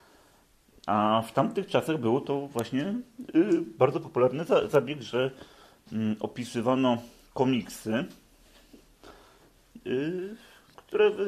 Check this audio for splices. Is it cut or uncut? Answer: uncut